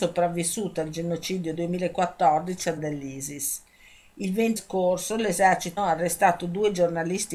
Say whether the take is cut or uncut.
cut